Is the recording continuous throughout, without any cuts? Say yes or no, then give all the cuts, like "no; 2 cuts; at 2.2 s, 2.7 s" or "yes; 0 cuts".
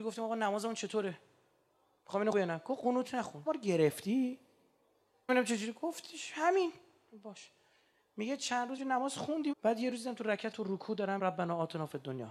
no; 7 cuts; at 2.3 s, 3.5 s, 5.3 s, 8.8 s, 9.5 s, 10.5 s, 11.2 s